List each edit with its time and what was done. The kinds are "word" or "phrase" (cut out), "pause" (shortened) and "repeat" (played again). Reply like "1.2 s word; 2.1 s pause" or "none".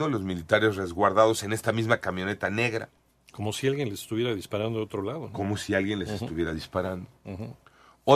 none